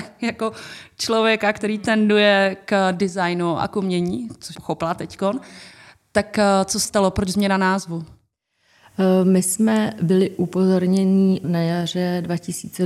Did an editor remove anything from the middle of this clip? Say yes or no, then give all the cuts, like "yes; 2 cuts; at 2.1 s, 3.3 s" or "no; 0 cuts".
yes; 3 cuts; at 4.5 s, 6.8 s, 11.4 s